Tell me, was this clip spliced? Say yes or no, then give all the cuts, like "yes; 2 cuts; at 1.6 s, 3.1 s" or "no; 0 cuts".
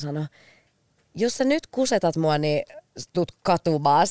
yes; 1 cut; at 3.1 s